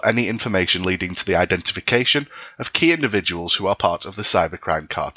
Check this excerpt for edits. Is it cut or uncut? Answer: uncut